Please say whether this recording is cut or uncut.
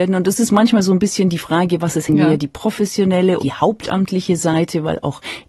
cut